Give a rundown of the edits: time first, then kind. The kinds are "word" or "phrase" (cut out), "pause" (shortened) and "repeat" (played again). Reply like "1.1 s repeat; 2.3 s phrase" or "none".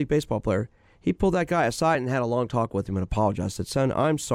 none